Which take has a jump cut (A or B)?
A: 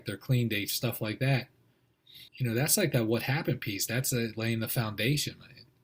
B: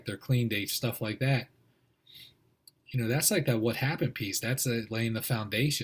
A